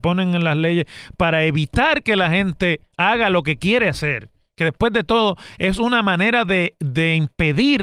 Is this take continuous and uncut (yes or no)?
yes